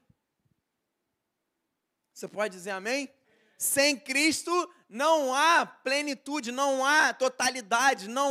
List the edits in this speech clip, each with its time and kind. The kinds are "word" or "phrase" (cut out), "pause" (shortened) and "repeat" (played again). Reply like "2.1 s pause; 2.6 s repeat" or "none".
3.2 s pause